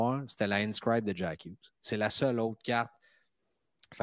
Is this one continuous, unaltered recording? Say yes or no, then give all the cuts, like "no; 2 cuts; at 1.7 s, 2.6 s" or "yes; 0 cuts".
yes; 0 cuts